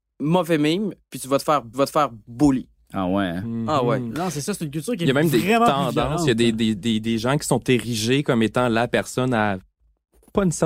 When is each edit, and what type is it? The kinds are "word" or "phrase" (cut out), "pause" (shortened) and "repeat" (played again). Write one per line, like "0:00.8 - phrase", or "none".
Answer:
0:01.7 - repeat